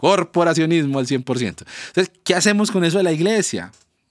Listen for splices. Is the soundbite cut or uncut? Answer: uncut